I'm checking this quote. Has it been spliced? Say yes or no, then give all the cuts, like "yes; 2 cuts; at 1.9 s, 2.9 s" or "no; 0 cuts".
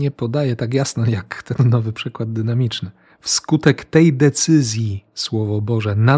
yes; 1 cut; at 3.1 s